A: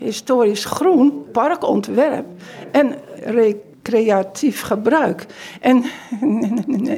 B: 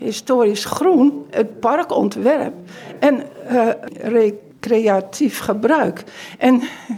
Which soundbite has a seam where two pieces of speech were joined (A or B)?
A